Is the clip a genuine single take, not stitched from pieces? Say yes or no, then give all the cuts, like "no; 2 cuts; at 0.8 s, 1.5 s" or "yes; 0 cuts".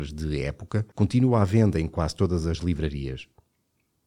no; 1 cut; at 0.9 s